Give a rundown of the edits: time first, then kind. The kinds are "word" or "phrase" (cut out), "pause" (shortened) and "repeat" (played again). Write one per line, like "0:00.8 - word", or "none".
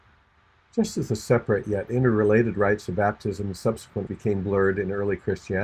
0:04.1 - word